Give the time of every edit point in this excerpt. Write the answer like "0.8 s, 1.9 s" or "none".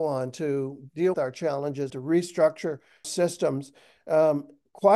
1.1 s, 1.9 s, 3.0 s